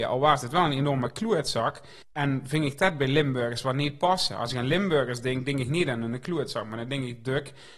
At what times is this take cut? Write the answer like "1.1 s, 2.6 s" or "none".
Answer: 2.0 s

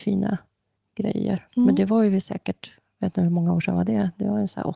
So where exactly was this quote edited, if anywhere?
none

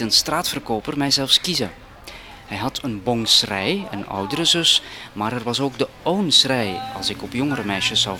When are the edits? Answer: none

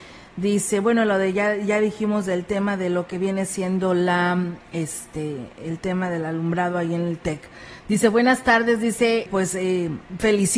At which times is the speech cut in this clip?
9.3 s

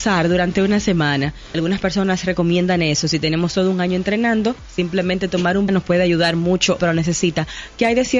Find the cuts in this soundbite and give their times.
1.5 s, 5.7 s, 6.8 s

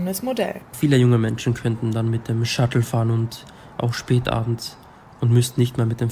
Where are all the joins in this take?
none

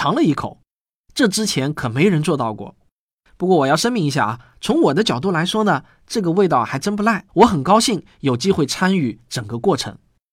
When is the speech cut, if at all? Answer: 7.3 s

